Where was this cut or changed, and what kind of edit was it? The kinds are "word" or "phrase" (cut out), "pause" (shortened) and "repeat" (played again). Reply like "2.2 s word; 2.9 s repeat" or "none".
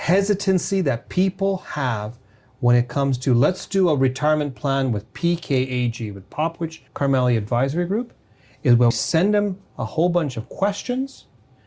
6.9 s pause; 8.9 s word